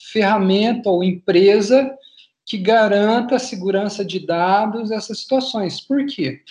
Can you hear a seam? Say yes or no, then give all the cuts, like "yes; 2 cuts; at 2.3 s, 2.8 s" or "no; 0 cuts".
no; 0 cuts